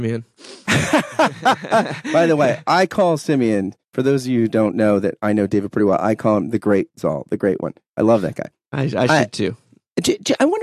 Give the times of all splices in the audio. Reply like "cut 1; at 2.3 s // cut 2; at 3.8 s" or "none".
none